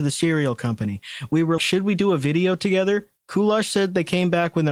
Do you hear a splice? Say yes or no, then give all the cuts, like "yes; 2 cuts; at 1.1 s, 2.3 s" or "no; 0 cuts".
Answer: yes; 2 cuts; at 1.6 s, 3.2 s